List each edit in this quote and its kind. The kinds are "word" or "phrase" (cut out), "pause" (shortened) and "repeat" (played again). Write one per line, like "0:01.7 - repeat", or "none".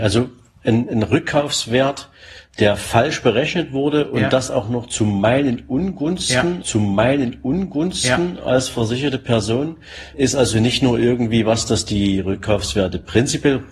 0:06.6 - repeat
0:10.1 - word